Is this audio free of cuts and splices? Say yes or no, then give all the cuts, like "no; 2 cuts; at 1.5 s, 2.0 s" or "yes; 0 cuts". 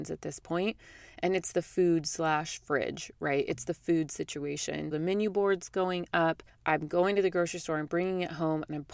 no; 2 cuts; at 4.9 s, 6.5 s